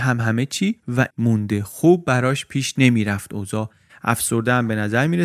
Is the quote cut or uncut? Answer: cut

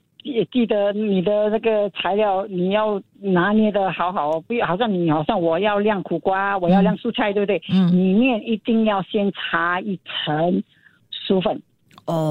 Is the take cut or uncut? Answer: uncut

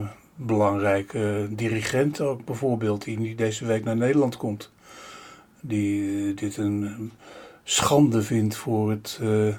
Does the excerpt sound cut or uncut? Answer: uncut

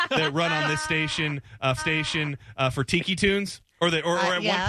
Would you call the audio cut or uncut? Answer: cut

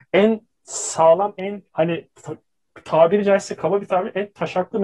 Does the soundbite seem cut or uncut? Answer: cut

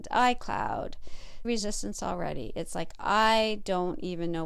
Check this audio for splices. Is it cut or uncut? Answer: cut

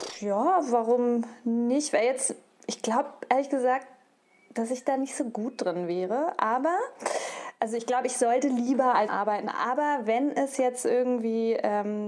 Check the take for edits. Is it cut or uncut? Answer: cut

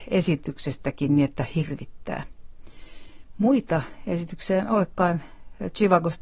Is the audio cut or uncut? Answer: uncut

